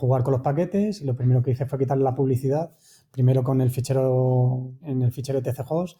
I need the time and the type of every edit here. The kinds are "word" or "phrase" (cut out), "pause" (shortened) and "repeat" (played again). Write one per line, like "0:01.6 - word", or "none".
0:04.8 - word